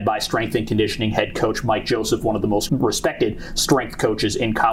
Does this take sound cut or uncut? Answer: cut